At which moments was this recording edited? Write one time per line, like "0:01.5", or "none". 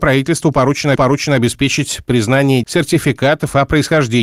0:01.0
0:02.6